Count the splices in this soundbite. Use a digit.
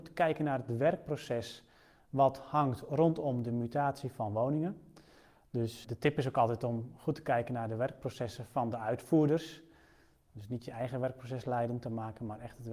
1